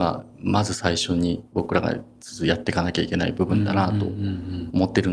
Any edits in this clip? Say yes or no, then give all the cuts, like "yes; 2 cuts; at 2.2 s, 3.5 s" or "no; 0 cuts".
yes; 1 cut; at 1.5 s